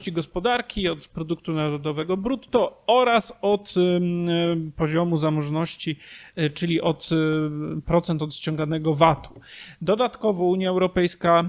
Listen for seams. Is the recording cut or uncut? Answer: uncut